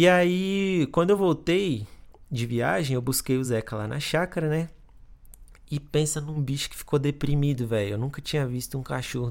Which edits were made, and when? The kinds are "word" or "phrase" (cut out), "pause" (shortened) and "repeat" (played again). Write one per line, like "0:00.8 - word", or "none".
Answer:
none